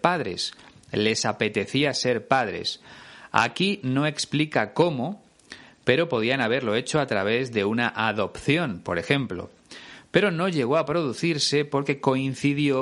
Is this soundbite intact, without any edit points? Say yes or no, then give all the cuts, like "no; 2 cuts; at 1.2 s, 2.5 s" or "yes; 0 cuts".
yes; 0 cuts